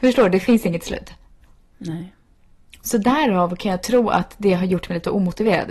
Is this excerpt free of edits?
yes; 0 cuts

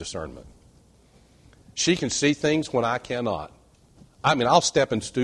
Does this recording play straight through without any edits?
yes; 0 cuts

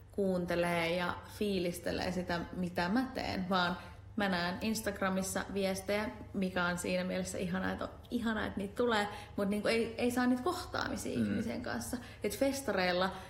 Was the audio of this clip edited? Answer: no; 0 cuts

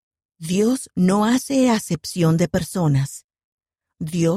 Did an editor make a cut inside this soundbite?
no; 0 cuts

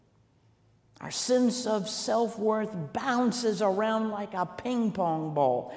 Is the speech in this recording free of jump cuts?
yes; 0 cuts

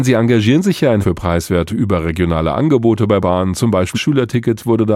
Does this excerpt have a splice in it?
yes; 4 cuts; at 1.0 s, 1.7 s, 3.2 s, 3.9 s

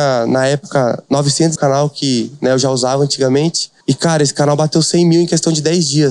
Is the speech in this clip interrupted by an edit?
yes; 2 cuts; at 1.6 s, 3.8 s

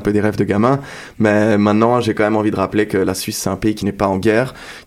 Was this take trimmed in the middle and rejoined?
no; 0 cuts

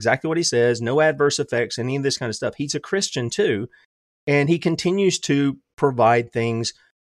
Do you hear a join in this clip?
no; 0 cuts

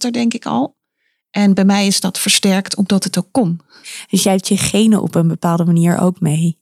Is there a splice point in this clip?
no; 0 cuts

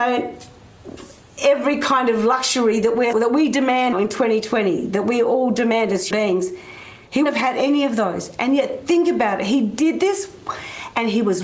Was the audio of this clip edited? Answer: yes; 4 cuts; at 3.1 s, 3.9 s, 6.1 s, 7.3 s

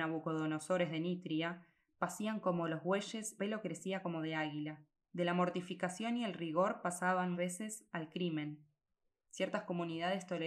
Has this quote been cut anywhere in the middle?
yes; 3 cuts; at 3.4 s, 5.0 s, 7.3 s

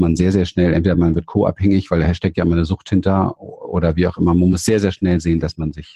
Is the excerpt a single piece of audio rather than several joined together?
yes; 0 cuts

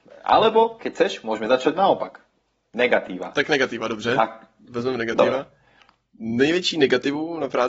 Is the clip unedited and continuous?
yes; 0 cuts

